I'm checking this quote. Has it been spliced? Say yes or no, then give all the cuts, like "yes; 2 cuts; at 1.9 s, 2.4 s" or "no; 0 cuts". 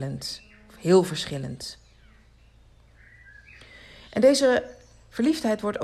no; 0 cuts